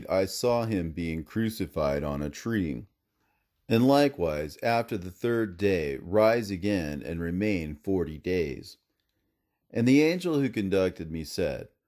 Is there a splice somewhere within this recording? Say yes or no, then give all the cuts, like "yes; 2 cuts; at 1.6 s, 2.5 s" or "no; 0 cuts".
no; 0 cuts